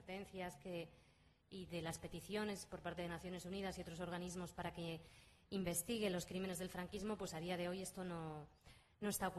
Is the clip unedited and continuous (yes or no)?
yes